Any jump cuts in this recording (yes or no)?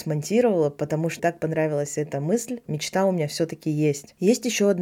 yes